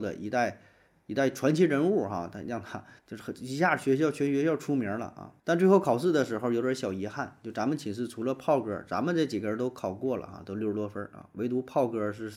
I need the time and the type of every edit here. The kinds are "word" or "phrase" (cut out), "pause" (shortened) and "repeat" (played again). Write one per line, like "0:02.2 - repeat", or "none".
0:03.0 - pause
0:05.4 - pause